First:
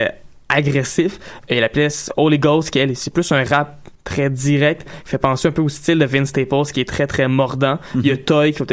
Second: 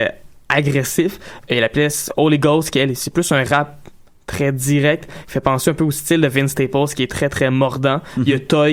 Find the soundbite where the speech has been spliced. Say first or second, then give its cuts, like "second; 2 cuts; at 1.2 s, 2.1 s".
first; 1 cut; at 4.0 s